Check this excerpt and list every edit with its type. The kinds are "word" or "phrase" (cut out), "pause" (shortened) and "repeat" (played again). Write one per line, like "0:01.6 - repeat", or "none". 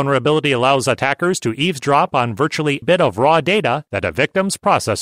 0:02.8 - word
0:03.9 - pause